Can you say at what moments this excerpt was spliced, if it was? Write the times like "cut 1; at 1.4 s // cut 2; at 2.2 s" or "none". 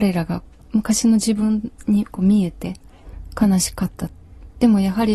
none